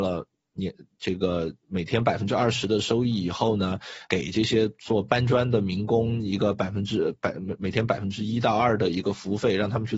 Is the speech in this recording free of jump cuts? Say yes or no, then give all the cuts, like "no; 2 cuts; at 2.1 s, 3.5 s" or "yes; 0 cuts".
no; 2 cuts; at 1.6 s, 4.0 s